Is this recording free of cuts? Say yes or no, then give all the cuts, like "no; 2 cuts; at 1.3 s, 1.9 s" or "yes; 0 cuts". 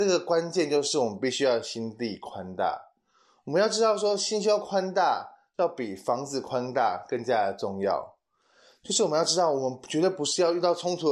yes; 0 cuts